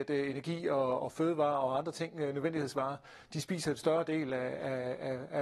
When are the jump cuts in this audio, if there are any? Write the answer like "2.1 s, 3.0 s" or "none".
1.0 s